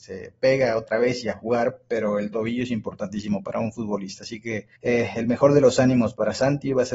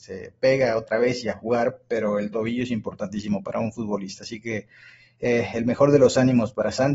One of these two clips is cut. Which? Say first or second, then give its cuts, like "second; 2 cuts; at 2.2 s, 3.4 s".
first; 1 cut; at 4.8 s